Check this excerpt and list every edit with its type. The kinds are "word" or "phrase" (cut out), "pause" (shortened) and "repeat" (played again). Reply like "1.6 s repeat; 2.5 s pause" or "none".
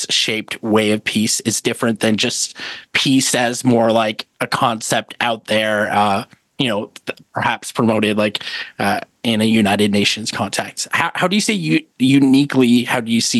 2.8 s pause; 4.3 s pause; 6.4 s pause